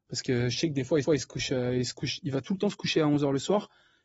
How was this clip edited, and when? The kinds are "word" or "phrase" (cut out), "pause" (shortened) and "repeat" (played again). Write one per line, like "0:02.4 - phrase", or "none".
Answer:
0:01.0 - repeat
0:02.2 - word